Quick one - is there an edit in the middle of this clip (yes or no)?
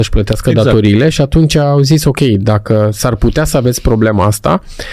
no